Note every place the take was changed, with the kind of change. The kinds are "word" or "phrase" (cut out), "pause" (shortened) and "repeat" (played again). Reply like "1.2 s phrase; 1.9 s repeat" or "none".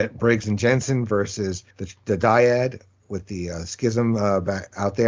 1.7 s pause